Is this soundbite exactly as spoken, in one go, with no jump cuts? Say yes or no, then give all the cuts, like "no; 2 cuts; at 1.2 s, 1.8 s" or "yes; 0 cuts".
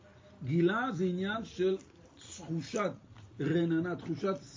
yes; 0 cuts